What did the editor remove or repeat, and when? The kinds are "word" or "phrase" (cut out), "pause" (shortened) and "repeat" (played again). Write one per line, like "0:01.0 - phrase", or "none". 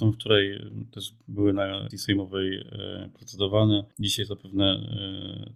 0:01.9 - word
0:03.9 - pause